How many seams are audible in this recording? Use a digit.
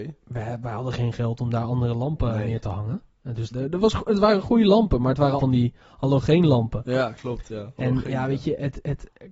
2